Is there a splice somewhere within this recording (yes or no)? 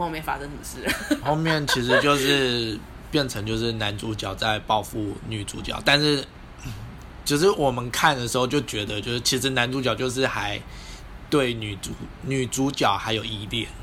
yes